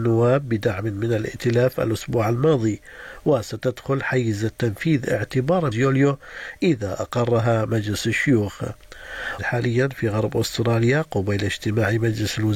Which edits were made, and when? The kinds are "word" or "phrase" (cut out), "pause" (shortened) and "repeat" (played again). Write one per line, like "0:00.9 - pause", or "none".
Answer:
0:05.7 - phrase
0:09.4 - phrase